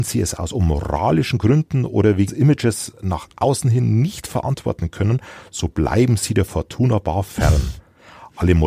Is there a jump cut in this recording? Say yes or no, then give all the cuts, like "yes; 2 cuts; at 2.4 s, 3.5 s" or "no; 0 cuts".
yes; 1 cut; at 2.3 s